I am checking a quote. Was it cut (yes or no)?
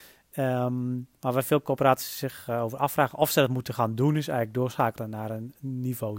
no